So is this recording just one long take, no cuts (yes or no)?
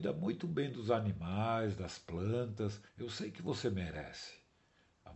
no